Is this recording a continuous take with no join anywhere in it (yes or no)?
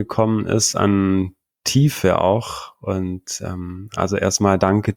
yes